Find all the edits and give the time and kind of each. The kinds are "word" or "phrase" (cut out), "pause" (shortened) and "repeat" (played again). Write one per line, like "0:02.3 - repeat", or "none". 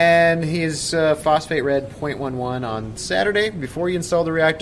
none